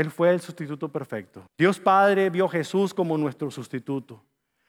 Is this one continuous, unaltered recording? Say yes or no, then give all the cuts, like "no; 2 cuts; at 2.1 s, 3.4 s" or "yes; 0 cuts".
no; 1 cut; at 1.5 s